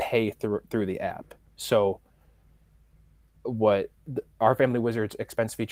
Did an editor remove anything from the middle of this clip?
no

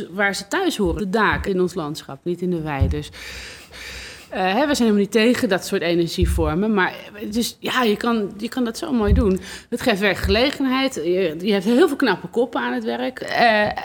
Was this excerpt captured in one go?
no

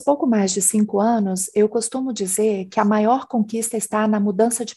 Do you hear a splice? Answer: no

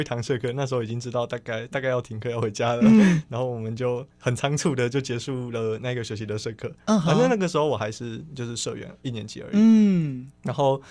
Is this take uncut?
no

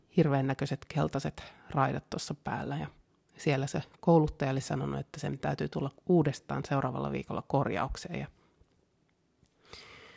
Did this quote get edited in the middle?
no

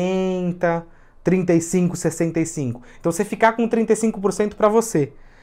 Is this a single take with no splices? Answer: yes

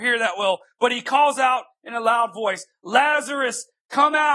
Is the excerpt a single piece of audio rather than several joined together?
yes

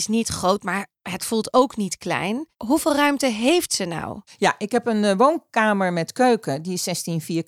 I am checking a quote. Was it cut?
yes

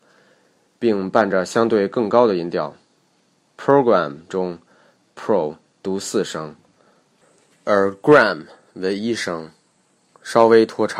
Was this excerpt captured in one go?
yes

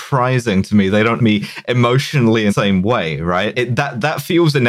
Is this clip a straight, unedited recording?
no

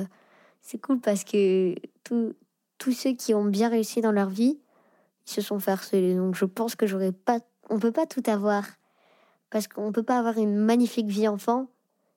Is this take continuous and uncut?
yes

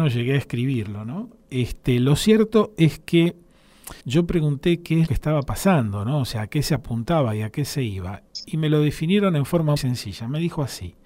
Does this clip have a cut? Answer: yes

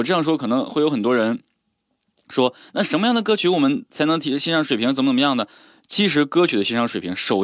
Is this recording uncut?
no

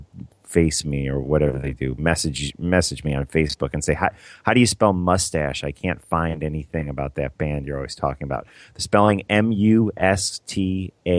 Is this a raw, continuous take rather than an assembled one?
yes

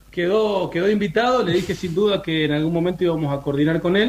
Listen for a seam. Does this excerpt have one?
no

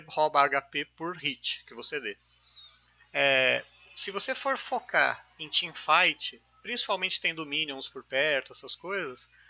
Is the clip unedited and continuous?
yes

